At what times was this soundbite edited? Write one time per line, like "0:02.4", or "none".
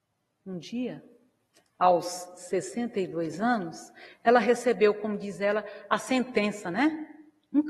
none